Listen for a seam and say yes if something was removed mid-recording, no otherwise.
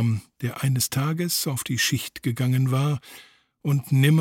no